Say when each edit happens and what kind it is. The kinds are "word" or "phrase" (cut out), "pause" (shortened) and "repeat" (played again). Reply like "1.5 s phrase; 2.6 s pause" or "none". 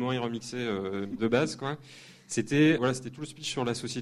1.1 s word; 2.8 s word